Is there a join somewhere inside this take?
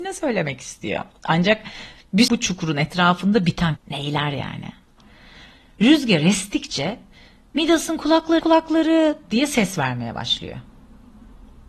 yes; 3 cuts; at 2.3 s, 3.8 s, 8.4 s

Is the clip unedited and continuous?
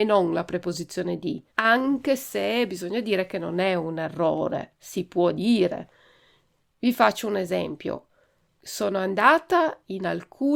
no; 1 cut; at 1.5 s

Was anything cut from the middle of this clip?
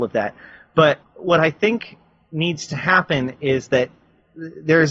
yes; 1 cut; at 1.0 s

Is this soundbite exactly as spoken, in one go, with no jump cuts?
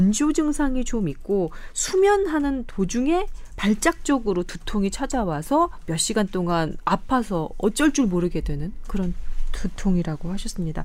yes; 0 cuts

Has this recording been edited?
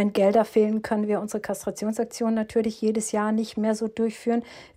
no; 0 cuts

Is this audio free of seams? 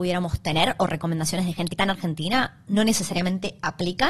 no; 1 cut; at 1.8 s

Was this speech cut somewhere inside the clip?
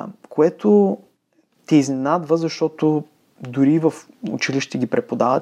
no; 0 cuts

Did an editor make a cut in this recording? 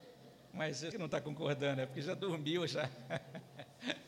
yes; 1 cut; at 0.9 s

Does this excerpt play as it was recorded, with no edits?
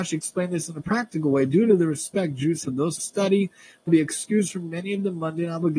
no; 3 cuts; at 2.6 s, 3.0 s, 3.9 s

